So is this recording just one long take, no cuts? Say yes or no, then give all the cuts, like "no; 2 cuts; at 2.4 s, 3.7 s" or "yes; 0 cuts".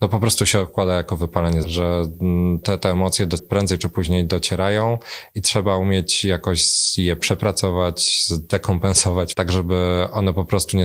no; 4 cuts; at 1.6 s, 2.6 s, 3.4 s, 9.3 s